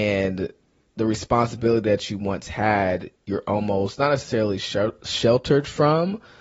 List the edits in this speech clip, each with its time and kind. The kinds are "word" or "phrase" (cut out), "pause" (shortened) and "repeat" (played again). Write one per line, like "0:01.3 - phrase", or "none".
none